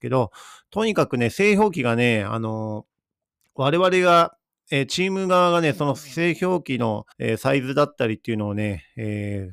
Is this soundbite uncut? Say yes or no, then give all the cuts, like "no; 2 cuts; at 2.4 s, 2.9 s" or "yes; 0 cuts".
no; 1 cut; at 7.1 s